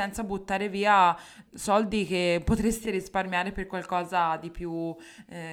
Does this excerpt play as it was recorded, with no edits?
no; 2 cuts; at 1.5 s, 2.8 s

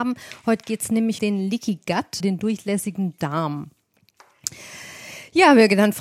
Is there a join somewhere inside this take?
yes; 2 cuts; at 1.2 s, 2.2 s

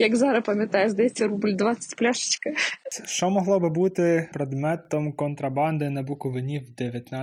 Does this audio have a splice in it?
yes; 1 cut; at 4.3 s

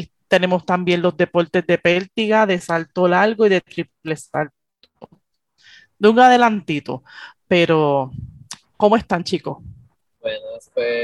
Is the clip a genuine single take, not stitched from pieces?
yes; 0 cuts

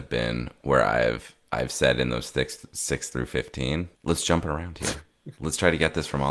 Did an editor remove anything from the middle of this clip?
yes; 1 cut; at 4.0 s

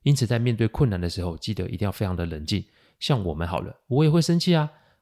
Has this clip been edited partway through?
no; 0 cuts

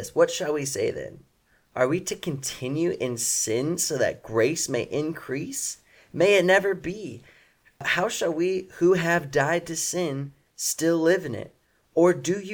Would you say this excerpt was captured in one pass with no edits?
yes; 0 cuts

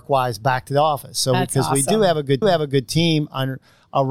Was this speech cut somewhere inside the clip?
yes; 1 cut; at 2.4 s

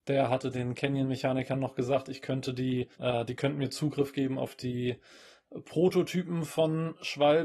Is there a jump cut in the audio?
yes; 1 cut; at 2.9 s

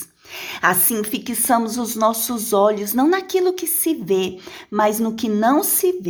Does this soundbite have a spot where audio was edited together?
no; 0 cuts

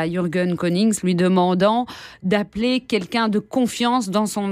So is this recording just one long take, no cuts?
yes; 0 cuts

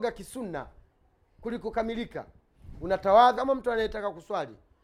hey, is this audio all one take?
no; 1 cut; at 3.3 s

